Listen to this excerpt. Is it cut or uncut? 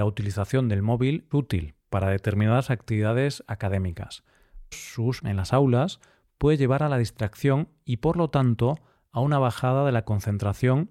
cut